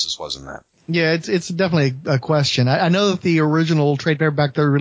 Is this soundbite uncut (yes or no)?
yes